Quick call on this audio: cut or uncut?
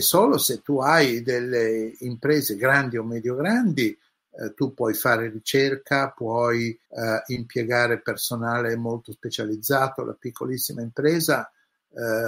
cut